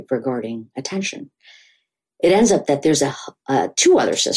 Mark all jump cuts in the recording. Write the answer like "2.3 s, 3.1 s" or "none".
none